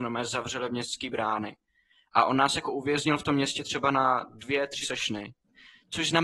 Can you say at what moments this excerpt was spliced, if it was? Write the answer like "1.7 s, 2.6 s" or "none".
4.8 s